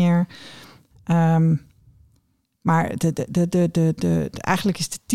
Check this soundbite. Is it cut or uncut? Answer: uncut